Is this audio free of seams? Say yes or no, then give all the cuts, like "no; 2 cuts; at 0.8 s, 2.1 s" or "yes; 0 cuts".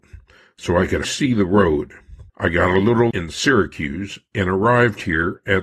no; 3 cuts; at 1.0 s, 2.3 s, 3.1 s